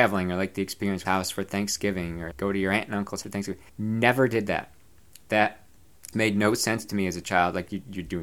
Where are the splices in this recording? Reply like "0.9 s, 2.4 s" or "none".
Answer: 1.0 s, 2.3 s, 3.2 s, 3.7 s, 6.1 s